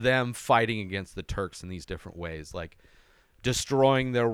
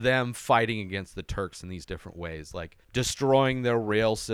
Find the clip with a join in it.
second; 1 cut; at 2.8 s

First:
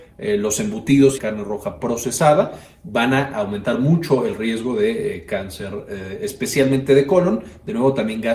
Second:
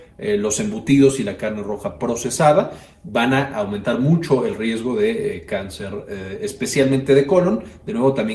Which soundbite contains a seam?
first; 1 cut; at 1.2 s

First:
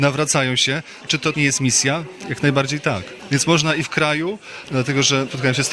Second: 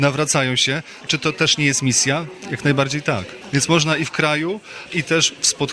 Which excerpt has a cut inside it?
first; 2 cuts; at 1.3 s, 4.7 s

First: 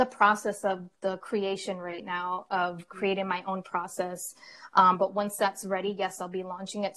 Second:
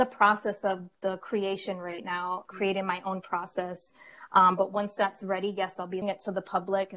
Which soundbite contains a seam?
second; 2 cuts; at 2.5 s, 6.0 s

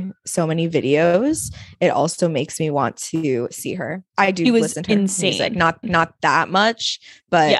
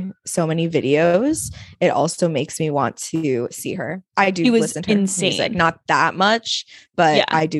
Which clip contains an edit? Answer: first; 1 cut; at 5.8 s

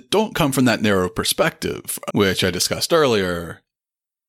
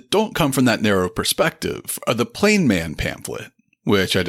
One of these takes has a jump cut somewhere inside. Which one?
first; 1 cut; at 2.1 s

